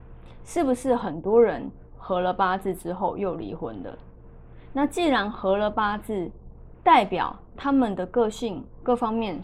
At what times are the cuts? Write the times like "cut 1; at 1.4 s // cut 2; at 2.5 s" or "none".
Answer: none